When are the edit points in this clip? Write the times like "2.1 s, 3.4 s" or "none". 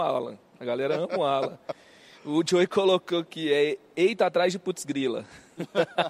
none